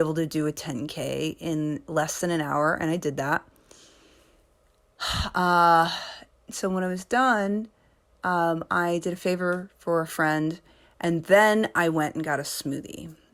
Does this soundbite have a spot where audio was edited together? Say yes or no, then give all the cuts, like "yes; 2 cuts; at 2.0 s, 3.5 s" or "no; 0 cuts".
no; 0 cuts